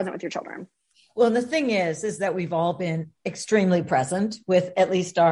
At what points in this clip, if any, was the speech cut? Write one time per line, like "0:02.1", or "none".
none